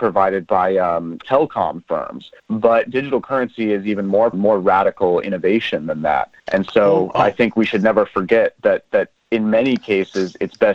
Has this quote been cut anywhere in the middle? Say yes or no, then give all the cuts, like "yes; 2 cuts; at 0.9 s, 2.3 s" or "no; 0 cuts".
yes; 4 cuts; at 1.2 s, 2.4 s, 4.3 s, 6.4 s